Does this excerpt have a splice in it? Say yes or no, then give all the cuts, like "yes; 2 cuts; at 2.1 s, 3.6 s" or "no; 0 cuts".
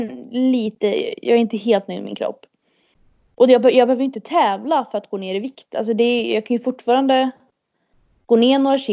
no; 0 cuts